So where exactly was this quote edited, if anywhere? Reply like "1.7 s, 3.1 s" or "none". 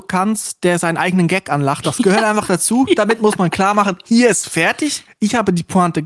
none